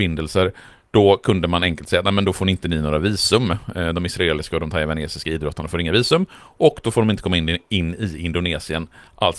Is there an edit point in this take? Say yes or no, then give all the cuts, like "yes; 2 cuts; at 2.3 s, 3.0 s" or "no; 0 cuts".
no; 0 cuts